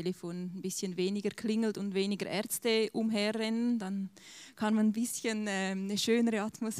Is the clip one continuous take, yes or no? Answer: yes